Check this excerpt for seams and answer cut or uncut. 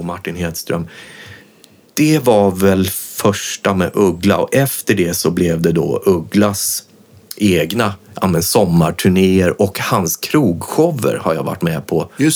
uncut